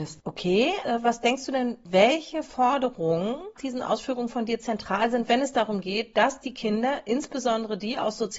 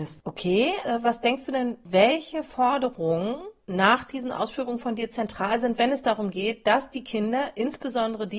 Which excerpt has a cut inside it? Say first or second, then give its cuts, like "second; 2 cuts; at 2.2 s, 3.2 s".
first; 1 cut; at 3.6 s